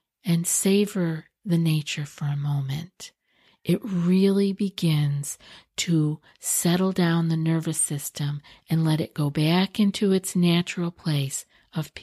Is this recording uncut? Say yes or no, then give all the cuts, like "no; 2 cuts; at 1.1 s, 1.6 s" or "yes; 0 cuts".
yes; 0 cuts